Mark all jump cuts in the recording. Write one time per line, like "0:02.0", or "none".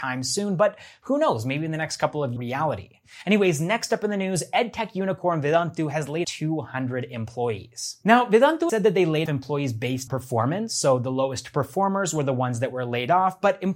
0:02.4
0:06.2
0:08.7
0:09.3
0:10.1

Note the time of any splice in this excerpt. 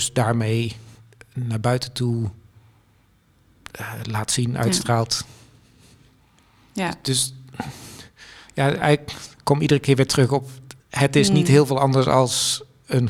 0:10.8

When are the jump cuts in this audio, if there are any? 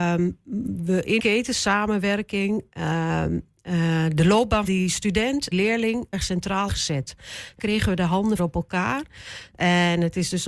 0:01.2
0:04.7
0:05.5
0:06.1
0:06.7
0:07.6
0:08.4

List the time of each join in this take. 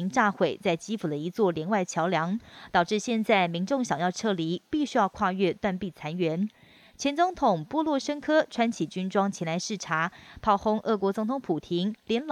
none

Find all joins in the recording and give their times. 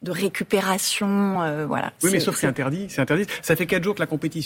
none

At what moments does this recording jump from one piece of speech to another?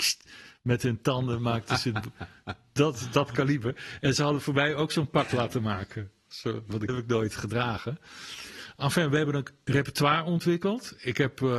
0:06.9

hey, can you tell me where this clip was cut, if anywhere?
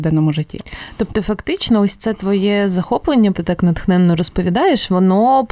0:03.3

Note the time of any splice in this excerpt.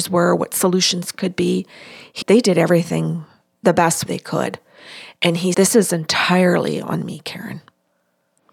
0:02.2
0:04.1
0:05.5

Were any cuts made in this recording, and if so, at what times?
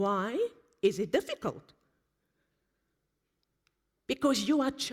none

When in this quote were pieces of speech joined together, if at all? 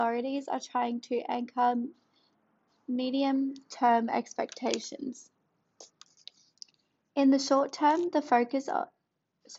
none

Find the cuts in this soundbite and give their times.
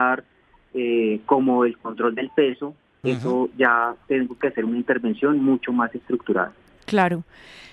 none

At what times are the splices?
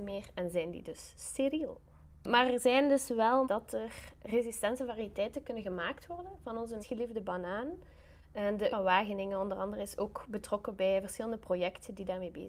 0:03.4
0:06.8
0:08.7

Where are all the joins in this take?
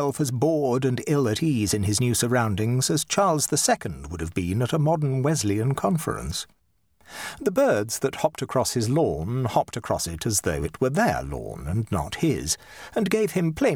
none

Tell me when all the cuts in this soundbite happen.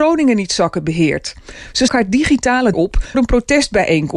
0:01.9
0:02.7
0:03.1

